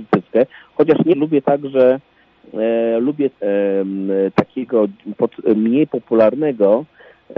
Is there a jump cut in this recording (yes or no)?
yes